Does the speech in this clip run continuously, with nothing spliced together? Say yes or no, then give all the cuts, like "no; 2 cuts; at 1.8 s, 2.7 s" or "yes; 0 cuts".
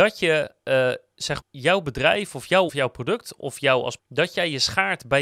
no; 4 cuts; at 1.4 s, 2.7 s, 3.4 s, 4.0 s